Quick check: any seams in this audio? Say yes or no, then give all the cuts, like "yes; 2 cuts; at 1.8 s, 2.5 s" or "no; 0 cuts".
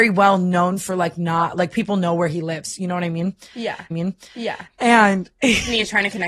yes; 1 cut; at 3.9 s